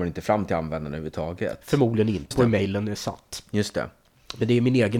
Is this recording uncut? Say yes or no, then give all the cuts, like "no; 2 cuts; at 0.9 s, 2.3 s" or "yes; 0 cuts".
no; 1 cut; at 2.3 s